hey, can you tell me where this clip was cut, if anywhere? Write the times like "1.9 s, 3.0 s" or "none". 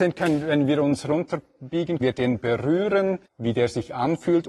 2.0 s, 3.3 s